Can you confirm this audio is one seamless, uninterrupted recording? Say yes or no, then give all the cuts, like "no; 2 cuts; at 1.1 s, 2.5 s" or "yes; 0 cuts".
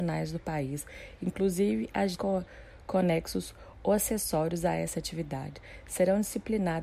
no; 1 cut; at 2.1 s